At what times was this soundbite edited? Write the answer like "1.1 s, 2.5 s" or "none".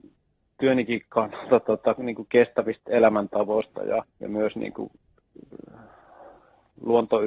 4.1 s